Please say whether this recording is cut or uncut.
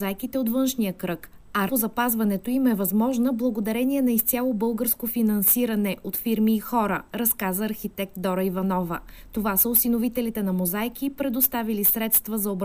cut